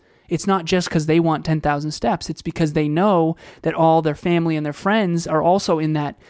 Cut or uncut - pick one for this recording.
uncut